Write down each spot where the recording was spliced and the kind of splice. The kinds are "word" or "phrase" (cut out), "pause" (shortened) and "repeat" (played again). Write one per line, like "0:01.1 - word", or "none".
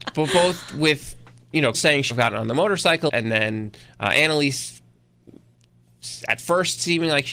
0:01.7 - word
0:02.1 - word
0:03.1 - word